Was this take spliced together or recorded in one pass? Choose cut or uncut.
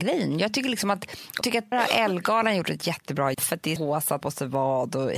cut